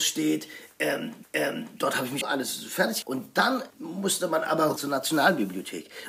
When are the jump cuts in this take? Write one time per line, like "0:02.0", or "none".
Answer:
0:01.2
0:02.2
0:03.0
0:03.7
0:04.8